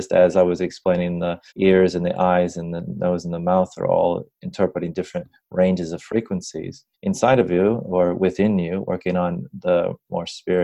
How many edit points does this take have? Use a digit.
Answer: 2